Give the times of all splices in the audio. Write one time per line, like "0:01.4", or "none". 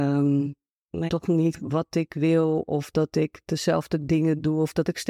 0:01.1
0:01.5